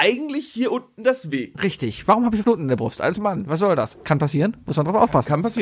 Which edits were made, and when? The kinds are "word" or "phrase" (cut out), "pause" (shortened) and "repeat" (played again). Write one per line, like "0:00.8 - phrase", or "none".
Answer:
0:02.4 - phrase